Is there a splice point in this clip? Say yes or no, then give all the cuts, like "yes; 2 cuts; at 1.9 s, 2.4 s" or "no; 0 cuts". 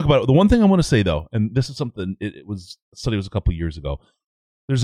yes; 1 cut; at 2.8 s